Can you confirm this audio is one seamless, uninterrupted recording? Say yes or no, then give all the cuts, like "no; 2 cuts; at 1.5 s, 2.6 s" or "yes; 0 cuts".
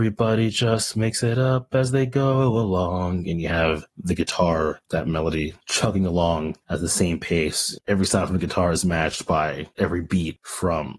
no; 2 cuts; at 4.8 s, 7.8 s